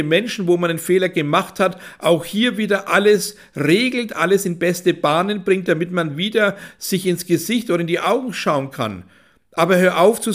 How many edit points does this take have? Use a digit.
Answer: 0